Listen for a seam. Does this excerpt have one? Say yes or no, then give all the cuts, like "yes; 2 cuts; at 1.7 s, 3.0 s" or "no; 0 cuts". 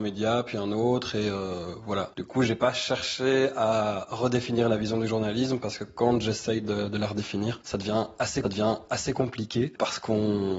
yes; 1 cut; at 8.4 s